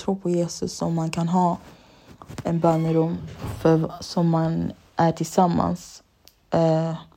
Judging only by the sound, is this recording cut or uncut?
uncut